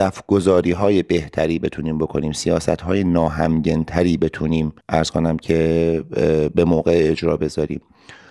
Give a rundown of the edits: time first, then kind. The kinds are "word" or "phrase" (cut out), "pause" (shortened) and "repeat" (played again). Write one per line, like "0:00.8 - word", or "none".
0:04.8 - pause